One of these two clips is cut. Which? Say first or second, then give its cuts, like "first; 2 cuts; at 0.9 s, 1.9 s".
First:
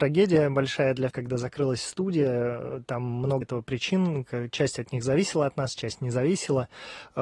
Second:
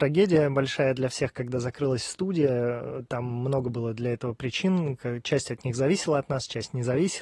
first; 2 cuts; at 1.1 s, 3.4 s